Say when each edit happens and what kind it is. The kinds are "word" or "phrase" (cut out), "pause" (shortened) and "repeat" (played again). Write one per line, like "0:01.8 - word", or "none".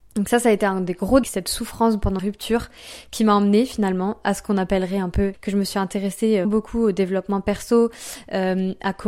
0:01.2 - word
0:02.2 - word
0:05.3 - phrase
0:06.4 - word